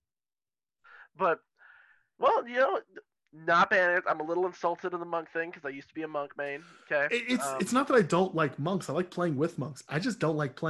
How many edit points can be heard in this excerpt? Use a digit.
0